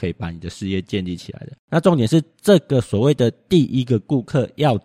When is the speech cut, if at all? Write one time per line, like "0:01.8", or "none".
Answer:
0:01.6

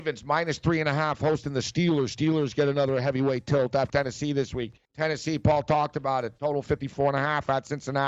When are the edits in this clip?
0:03.9
0:04.9

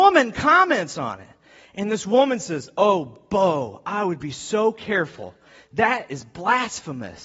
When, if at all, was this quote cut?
none

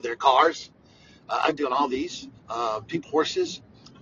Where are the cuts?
0:01.6
0:02.4
0:03.0

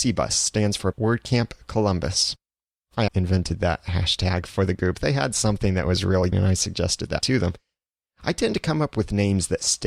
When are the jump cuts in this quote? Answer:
0:00.9
0:03.1
0:06.3
0:07.2

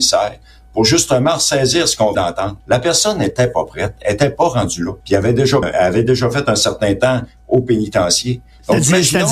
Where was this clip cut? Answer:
0:02.1
0:02.6
0:05.0
0:05.6

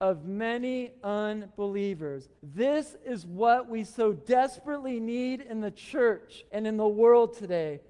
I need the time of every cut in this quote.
0:02.4
0:06.5

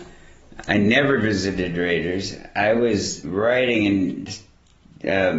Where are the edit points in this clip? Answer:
0:03.2

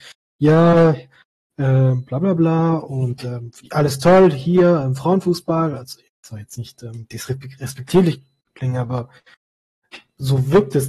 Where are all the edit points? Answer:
none

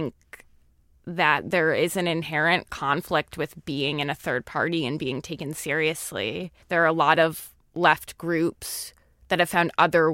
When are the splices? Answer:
0:06.6

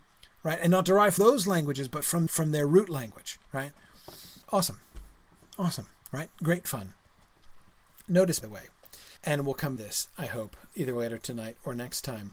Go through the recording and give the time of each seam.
0:01.2
0:02.3
0:04.4
0:08.4
0:09.2
0:09.8
0:10.7

